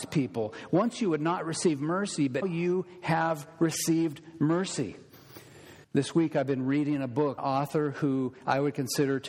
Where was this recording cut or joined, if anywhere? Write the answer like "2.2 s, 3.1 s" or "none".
2.4 s, 5.8 s, 7.4 s